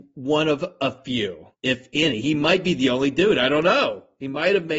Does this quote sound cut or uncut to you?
cut